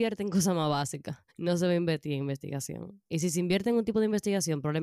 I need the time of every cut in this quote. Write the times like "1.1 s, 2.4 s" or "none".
1.3 s, 3.1 s